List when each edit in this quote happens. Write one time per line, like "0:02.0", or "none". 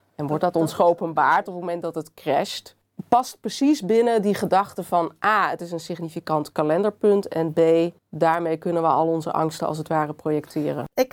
0:08.0

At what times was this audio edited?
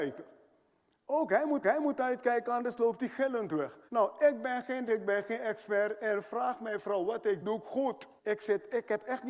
0:01.6
0:03.9
0:04.9
0:07.4
0:08.2

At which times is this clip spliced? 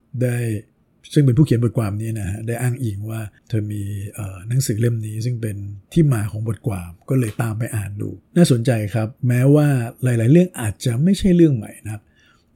0:03.4
0:08.3
0:09.2

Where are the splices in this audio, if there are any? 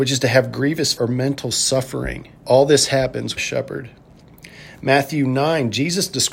0:01.0
0:02.4
0:03.4

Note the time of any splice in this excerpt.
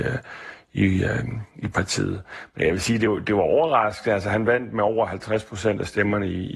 none

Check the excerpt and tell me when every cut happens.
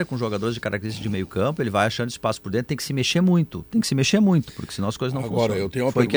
none

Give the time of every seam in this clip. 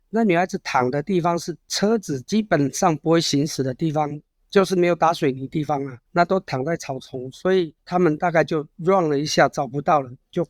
0:06.1
0:07.8

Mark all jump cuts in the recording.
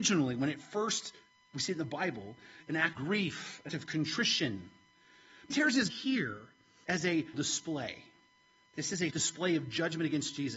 0:02.6
0:02.9
0:03.7
0:05.5
0:05.9
0:06.8
0:07.3
0:09.1

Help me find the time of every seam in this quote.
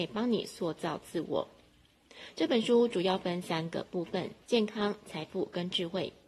0:04.4

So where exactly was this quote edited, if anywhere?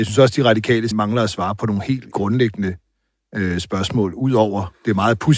0:00.9
0:02.1

